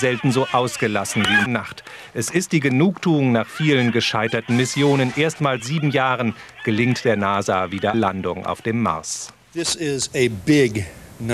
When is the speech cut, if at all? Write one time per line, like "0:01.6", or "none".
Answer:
0:01.5
0:05.6
0:07.9